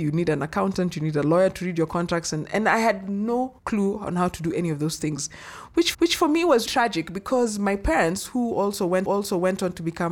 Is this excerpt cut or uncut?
cut